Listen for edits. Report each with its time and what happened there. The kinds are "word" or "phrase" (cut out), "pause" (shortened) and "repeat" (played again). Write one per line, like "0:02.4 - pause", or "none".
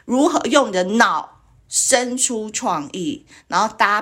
none